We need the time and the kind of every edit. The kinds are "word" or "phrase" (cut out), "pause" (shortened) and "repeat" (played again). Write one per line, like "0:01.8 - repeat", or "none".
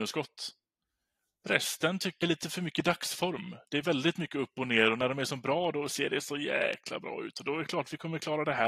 0:02.2 - word

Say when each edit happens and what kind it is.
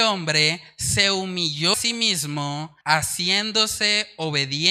0:01.7 - word
0:02.8 - pause

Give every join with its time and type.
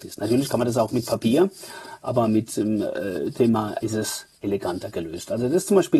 0:03.8 - word

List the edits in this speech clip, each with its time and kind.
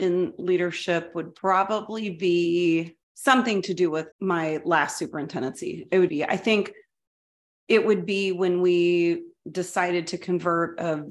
0:01.4 - pause
0:03.0 - pause
0:04.1 - pause
0:06.1 - phrase

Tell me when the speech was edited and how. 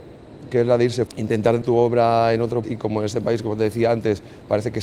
0:01.1 - word
0:01.6 - word
0:02.6 - word

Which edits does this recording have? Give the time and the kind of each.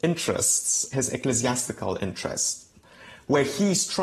0:00.9 - word

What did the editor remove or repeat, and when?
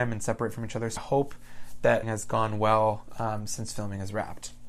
0:01.0 - word
0:02.0 - word

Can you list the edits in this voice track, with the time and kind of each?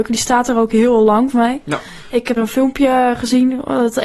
0:01.3 - word
0:02.4 - word

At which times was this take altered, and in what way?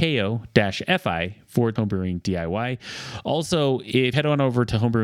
0:01.8 - word
0:04.1 - word

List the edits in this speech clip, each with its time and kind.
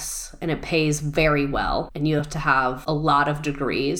none

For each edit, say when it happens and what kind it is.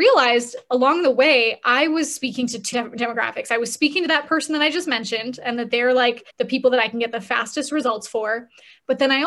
0:02.7 - word
0:06.3 - pause

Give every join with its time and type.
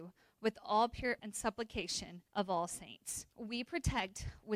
0:01.2 - word
0:02.3 - pause
0:03.3 - pause

